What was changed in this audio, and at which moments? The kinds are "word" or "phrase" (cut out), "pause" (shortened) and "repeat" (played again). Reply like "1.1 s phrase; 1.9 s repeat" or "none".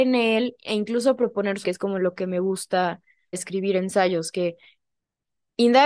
1.6 s word; 3.3 s word